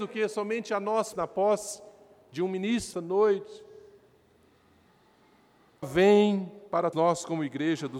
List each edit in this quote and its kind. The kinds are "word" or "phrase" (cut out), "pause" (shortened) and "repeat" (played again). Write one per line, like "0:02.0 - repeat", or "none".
0:01.1 - word
0:02.9 - word
0:05.8 - word
0:06.9 - word